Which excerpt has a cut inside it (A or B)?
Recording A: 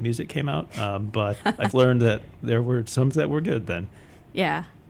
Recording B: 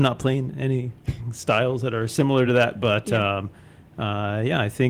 A